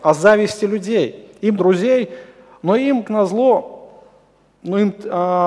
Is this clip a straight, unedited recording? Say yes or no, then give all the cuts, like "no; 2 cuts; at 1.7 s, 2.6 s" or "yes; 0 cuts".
no; 2 cuts; at 1.6 s, 3.0 s